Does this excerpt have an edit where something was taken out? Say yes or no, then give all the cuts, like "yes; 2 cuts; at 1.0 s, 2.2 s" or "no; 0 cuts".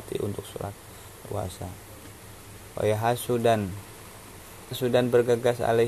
yes; 2 cuts; at 1.2 s, 4.7 s